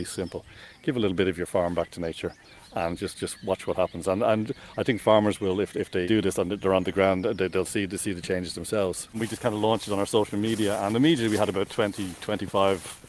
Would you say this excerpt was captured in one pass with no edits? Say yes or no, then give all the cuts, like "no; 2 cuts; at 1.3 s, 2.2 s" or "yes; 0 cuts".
yes; 0 cuts